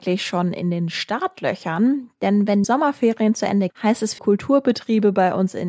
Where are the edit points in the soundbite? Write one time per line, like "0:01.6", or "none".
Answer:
0:02.6
0:03.7
0:04.2